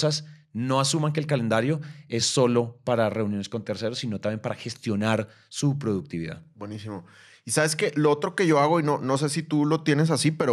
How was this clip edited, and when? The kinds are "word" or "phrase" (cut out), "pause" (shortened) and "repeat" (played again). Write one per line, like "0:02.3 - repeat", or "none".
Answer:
none